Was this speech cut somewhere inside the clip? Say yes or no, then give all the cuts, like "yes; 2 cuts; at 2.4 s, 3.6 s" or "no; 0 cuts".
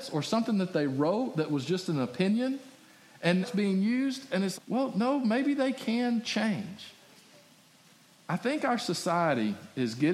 yes; 2 cuts; at 3.4 s, 4.5 s